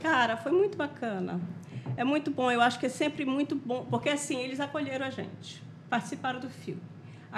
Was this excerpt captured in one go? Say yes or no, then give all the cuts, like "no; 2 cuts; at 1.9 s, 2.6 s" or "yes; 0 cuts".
yes; 0 cuts